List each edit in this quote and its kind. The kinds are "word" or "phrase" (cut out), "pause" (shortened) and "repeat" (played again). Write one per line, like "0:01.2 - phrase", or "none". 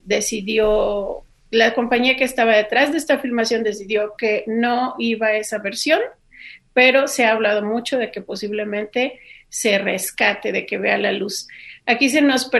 none